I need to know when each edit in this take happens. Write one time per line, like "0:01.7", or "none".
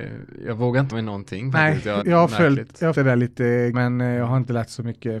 0:00.9
0:02.0
0:02.9
0:03.7